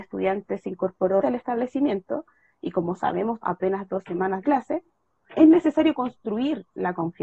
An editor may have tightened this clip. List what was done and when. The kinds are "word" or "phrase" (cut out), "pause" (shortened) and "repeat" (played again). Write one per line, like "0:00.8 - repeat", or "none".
0:01.2 - word
0:03.4 - word
0:04.4 - word
0:05.3 - word

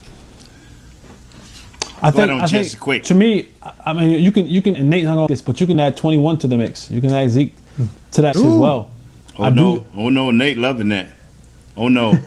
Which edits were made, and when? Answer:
0:04.7 - phrase
0:05.3 - word
0:05.7 - word
0:08.3 - word

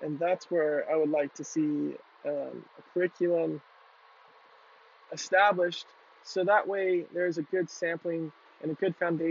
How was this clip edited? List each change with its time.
none

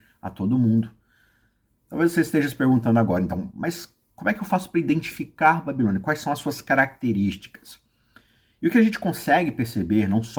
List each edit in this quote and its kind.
none

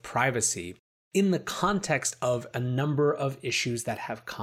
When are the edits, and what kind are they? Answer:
none

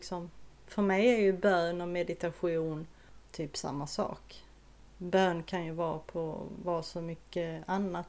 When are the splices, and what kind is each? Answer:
none

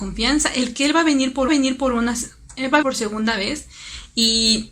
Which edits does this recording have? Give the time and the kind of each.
0:01.5 - repeat
0:02.8 - word

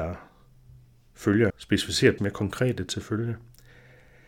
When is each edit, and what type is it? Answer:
0:01.5 - word
0:02.2 - word
0:02.9 - word

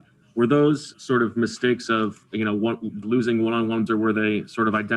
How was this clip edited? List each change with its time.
0:00.9 - word
0:03.0 - word
0:03.9 - word

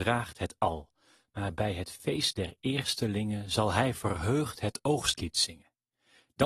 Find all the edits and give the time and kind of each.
none

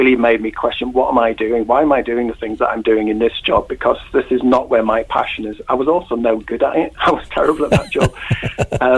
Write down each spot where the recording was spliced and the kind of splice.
none

